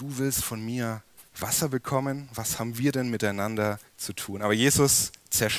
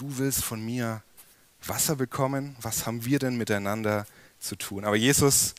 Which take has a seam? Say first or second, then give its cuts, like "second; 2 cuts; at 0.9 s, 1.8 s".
first; 2 cuts; at 1.3 s, 3.9 s